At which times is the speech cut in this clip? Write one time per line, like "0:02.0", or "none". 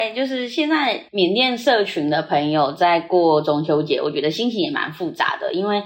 0:01.1